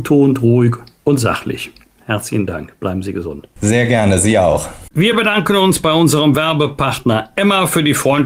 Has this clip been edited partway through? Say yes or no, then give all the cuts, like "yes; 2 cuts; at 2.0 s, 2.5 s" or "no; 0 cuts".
no; 0 cuts